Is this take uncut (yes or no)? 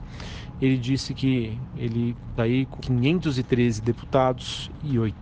no